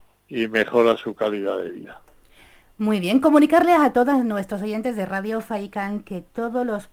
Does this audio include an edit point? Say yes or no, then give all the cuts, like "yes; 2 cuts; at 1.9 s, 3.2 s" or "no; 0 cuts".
no; 0 cuts